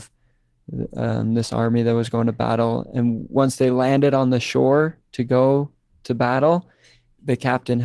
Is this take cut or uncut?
uncut